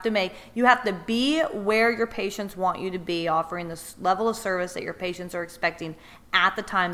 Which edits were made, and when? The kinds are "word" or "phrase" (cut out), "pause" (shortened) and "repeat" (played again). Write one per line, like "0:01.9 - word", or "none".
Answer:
none